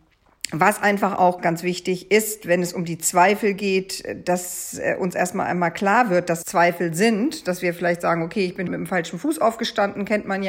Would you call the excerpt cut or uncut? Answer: cut